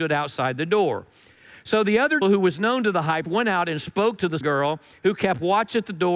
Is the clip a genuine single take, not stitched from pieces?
no; 3 cuts; at 2.2 s, 3.2 s, 4.4 s

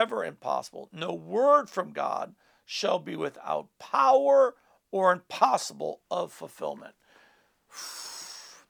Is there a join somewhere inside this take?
no; 0 cuts

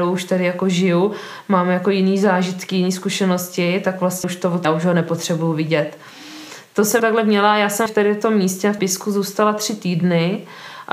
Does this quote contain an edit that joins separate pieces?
yes; 5 cuts; at 4.2 s, 4.6 s, 7.0 s, 7.9 s, 8.8 s

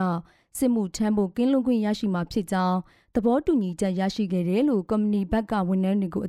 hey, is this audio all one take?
yes; 0 cuts

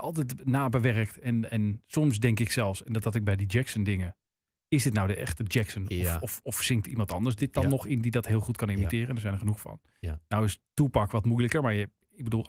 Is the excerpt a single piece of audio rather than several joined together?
yes; 0 cuts

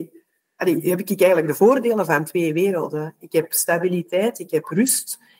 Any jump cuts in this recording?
no; 0 cuts

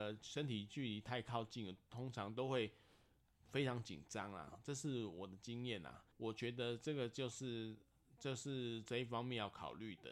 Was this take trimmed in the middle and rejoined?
yes; 1 cut; at 6.1 s

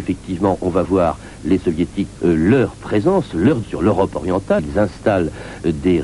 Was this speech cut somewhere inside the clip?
yes; 3 cuts; at 2.2 s, 3.6 s, 4.6 s

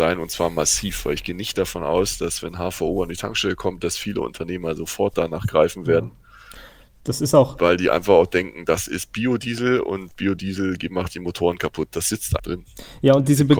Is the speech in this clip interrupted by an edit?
yes; 1 cut; at 12.4 s

